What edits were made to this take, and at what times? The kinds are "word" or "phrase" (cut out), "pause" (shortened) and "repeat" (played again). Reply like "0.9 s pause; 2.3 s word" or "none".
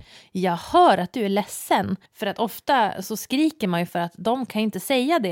2.1 s pause